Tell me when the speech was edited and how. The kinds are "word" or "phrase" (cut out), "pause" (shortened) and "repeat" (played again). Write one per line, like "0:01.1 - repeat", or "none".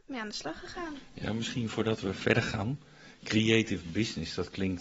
none